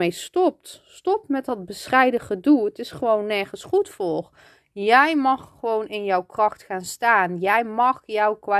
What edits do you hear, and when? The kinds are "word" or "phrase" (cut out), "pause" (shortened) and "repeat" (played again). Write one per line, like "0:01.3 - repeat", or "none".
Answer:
none